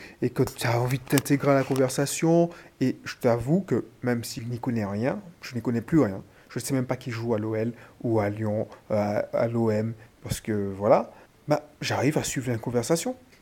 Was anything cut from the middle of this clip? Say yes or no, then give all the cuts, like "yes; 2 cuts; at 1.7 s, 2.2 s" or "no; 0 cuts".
no; 0 cuts